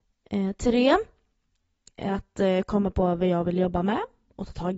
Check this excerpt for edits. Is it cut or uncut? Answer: uncut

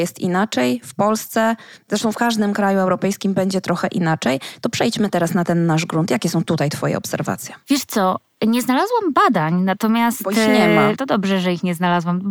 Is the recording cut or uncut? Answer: uncut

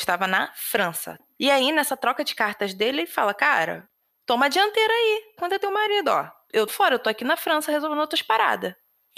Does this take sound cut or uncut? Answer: cut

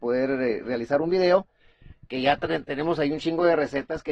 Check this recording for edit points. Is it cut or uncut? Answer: uncut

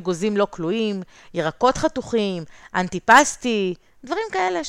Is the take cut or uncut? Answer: uncut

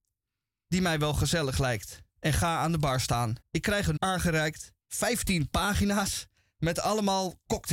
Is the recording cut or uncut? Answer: cut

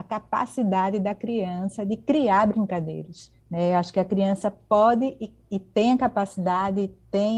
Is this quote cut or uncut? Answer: cut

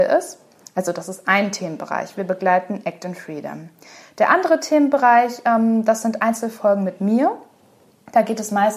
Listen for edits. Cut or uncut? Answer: uncut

